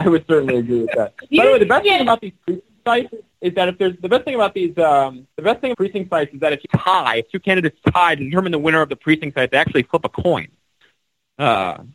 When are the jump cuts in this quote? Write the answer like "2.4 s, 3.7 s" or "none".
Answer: 5.3 s, 5.7 s, 6.6 s